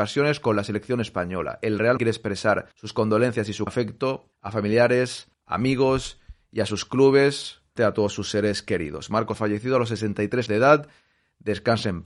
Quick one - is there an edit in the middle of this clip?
yes; 8 cuts; at 2.0 s, 2.7 s, 3.7 s, 4.3 s, 5.3 s, 7.8 s, 9.3 s, 10.5 s

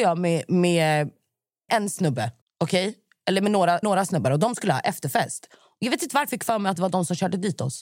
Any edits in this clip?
yes; 4 cuts; at 1.7 s, 2.4 s, 3.8 s, 6.3 s

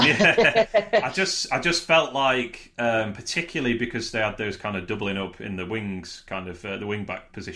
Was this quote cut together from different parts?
no; 0 cuts

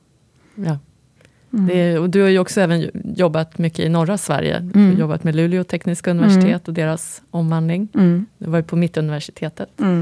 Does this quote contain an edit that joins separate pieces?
no; 0 cuts

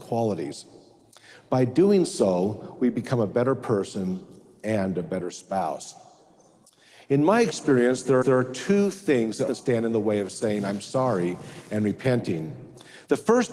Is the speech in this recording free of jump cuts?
no; 2 cuts; at 8.2 s, 9.5 s

